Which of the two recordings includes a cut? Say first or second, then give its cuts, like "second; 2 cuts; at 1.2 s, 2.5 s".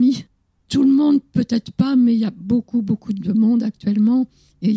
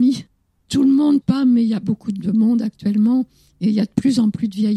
second; 2 cuts; at 1.2 s, 1.8 s